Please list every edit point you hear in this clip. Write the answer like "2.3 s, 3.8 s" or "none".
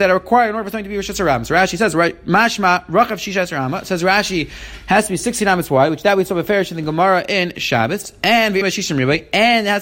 8.6 s